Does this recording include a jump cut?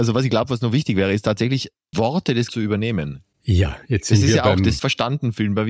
yes; 3 cuts; at 1.9 s, 2.5 s, 4.8 s

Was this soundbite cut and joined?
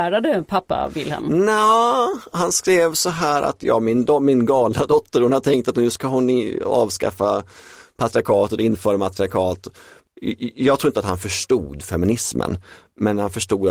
no; 0 cuts

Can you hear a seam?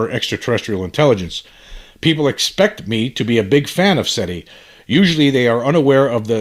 no; 0 cuts

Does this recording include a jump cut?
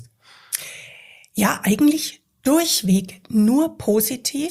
no; 0 cuts

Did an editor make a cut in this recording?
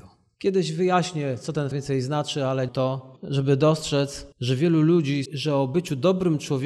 yes; 4 cuts; at 1.7 s, 2.7 s, 4.3 s, 5.3 s

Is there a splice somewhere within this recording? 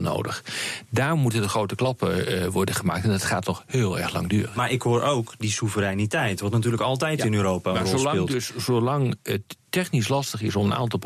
no; 0 cuts

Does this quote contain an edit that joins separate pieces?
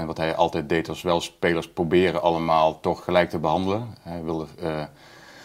no; 0 cuts

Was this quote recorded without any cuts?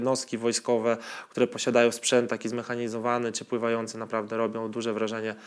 yes; 0 cuts

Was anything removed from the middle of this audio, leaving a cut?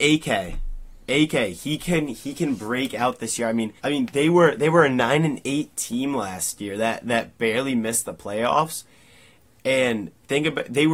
yes; 1 cut; at 3.8 s

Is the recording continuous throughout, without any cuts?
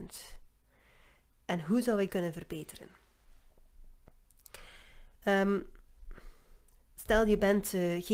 no; 2 cuts; at 2.1 s, 5.1 s

